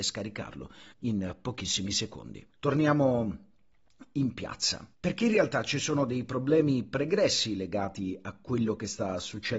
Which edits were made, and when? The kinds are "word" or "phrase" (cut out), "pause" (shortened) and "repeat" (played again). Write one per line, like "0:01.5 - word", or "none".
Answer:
0:00.9 - pause
0:02.5 - pause
0:04.9 - pause